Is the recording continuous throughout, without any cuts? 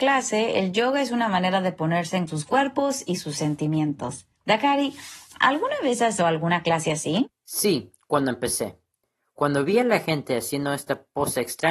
no; 3 cuts; at 2.3 s, 4.4 s, 6.2 s

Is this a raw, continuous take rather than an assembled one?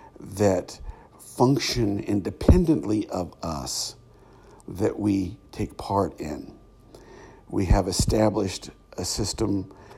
yes; 0 cuts

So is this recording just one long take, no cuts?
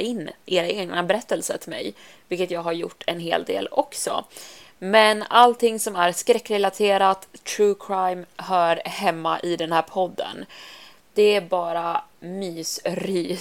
yes; 0 cuts

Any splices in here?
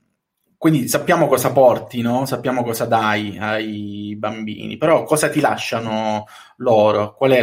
no; 0 cuts

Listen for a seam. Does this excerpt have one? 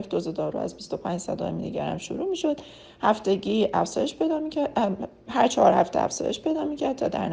no; 0 cuts

